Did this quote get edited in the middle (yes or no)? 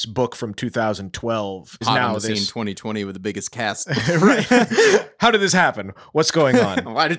yes